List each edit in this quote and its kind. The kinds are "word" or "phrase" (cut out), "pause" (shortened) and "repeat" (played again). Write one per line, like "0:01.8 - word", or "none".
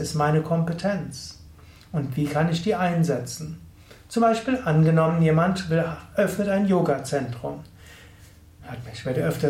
none